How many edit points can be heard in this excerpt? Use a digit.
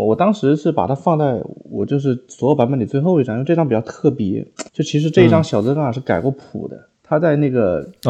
2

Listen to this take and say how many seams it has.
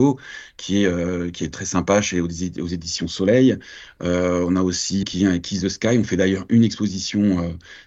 2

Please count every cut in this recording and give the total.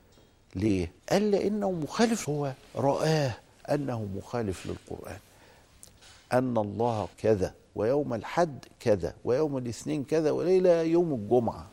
3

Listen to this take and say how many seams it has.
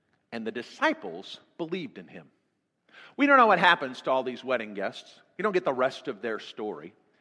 0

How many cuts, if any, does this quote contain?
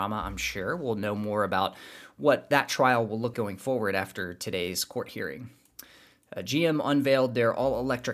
1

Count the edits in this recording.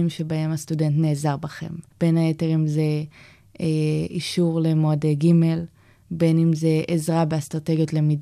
0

